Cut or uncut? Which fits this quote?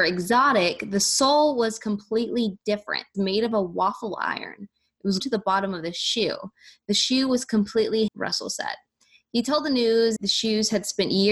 cut